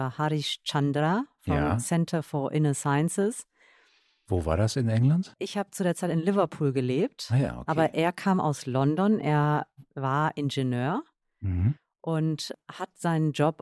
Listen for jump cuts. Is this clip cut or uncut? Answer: uncut